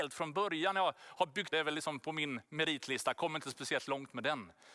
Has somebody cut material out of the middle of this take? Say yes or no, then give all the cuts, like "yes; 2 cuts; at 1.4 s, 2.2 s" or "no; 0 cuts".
yes; 2 cuts; at 1.5 s, 2.4 s